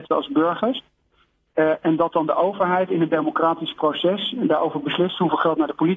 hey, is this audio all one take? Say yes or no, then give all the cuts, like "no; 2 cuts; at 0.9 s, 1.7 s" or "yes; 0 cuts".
yes; 0 cuts